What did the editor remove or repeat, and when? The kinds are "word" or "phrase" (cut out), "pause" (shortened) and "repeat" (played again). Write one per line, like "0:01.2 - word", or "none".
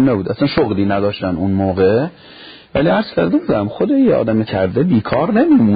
0:04.4 - word